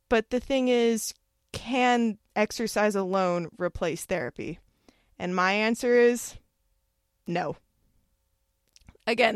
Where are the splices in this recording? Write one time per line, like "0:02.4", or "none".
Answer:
none